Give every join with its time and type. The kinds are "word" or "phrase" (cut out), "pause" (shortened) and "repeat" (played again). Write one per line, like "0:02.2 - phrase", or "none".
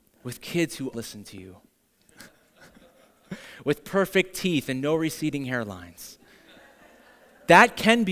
0:00.9 - word